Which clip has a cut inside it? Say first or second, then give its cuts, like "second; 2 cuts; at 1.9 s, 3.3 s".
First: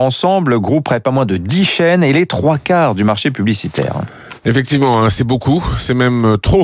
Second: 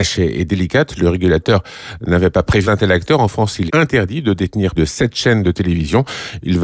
second; 3 cuts; at 2.6 s, 3.7 s, 4.8 s